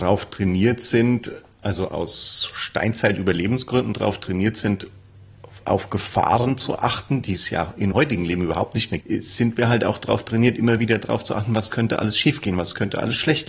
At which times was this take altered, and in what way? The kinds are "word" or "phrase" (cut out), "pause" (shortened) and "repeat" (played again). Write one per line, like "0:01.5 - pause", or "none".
0:01.9 - word
0:07.9 - word
0:09.0 - word